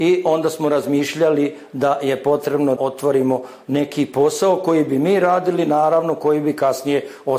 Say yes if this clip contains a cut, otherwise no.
yes